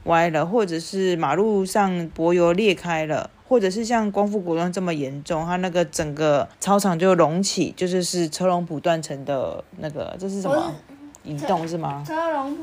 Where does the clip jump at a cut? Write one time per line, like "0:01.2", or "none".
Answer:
0:06.5
0:11.1